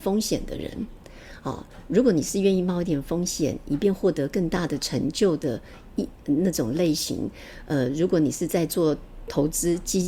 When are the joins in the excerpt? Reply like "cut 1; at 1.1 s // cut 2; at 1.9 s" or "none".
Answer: none